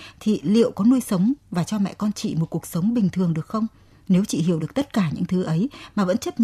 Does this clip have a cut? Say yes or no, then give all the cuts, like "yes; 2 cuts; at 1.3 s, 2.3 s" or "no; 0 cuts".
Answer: no; 0 cuts